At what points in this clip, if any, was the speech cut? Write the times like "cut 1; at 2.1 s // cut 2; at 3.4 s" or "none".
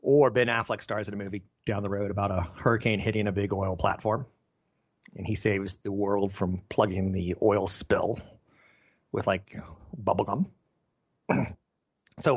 none